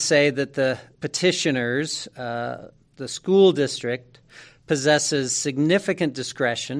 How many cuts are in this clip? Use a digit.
1